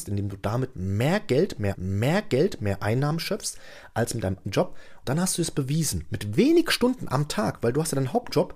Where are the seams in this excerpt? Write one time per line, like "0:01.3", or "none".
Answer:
0:01.7
0:04.4
0:05.0